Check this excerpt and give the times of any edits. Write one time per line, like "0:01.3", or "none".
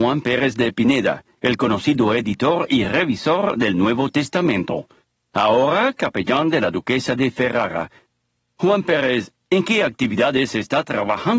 none